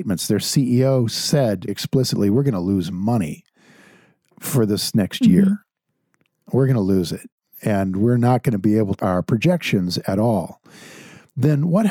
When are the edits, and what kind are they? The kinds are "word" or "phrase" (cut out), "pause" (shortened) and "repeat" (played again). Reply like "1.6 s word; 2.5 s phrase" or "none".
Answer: 1.7 s word; 9.0 s word